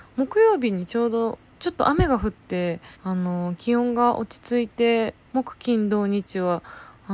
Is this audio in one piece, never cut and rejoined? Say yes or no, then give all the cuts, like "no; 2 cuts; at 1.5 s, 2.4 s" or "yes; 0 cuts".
no; 1 cut; at 2.9 s